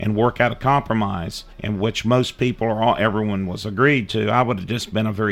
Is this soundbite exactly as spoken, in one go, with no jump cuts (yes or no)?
no